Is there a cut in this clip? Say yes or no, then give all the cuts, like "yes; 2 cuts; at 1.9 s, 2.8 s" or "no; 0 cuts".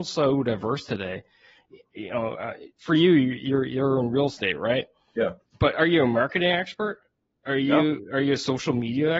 no; 0 cuts